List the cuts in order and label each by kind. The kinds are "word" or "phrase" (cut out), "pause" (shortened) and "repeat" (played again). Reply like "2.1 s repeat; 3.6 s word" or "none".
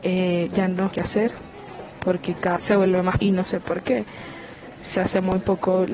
0.9 s word; 2.6 s word; 3.2 s word; 5.0 s word